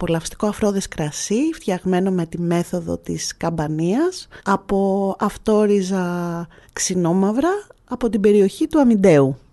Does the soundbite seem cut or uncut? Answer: cut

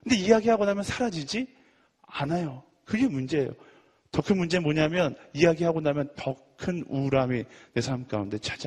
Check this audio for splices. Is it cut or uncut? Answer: uncut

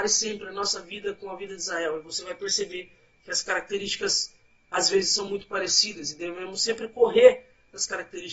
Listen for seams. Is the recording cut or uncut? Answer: uncut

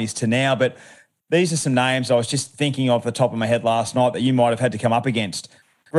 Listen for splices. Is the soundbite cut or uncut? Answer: uncut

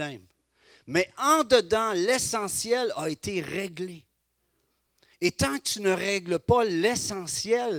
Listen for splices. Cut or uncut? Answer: uncut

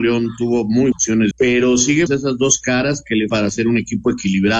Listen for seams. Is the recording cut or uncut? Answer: cut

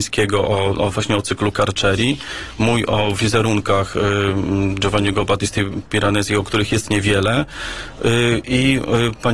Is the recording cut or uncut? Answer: uncut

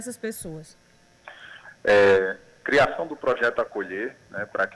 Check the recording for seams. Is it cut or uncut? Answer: uncut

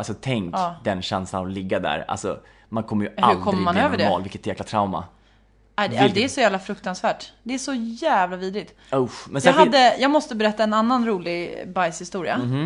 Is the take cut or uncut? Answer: uncut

